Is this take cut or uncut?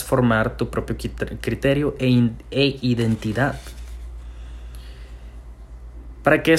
uncut